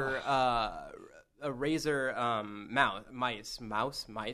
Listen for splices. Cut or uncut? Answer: uncut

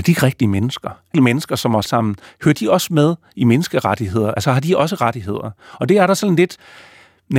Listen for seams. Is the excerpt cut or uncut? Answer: cut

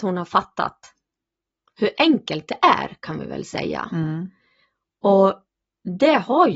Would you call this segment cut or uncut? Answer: uncut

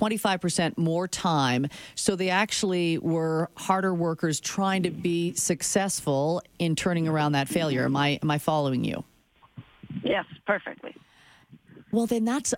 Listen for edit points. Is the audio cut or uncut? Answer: uncut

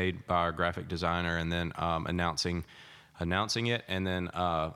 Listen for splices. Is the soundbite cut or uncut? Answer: uncut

